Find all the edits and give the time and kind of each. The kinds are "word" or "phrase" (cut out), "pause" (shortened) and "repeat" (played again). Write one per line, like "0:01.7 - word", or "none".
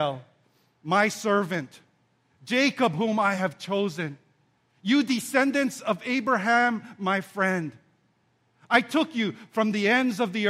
none